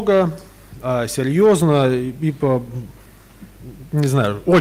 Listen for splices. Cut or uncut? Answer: uncut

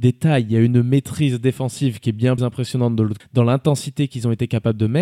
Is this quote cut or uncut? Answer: cut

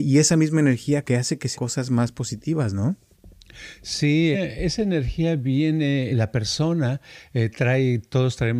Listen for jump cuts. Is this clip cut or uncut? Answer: cut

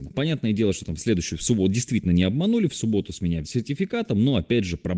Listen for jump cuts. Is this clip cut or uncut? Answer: cut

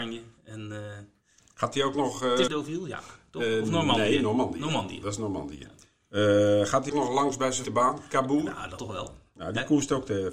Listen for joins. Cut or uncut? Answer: cut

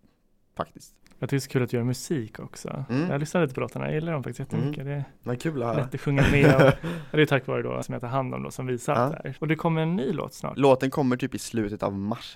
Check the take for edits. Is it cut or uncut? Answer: cut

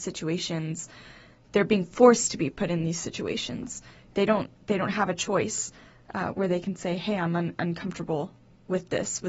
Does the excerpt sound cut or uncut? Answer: uncut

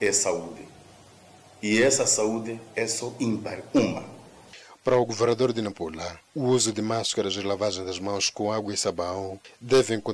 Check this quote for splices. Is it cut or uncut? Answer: cut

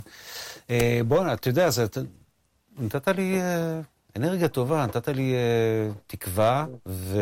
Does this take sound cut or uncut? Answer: uncut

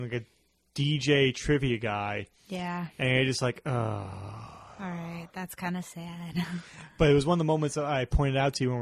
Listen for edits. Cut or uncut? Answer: uncut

